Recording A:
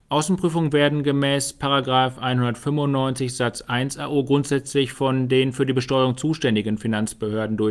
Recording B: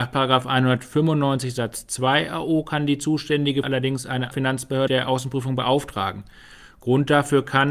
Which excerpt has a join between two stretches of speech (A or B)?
B